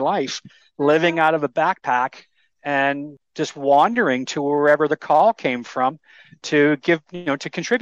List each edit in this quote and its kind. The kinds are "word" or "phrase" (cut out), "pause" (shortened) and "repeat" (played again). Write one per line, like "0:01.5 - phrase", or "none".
none